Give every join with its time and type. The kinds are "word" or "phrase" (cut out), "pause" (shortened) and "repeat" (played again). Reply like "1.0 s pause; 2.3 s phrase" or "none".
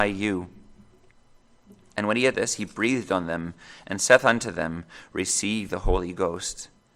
2.3 s word; 5.7 s word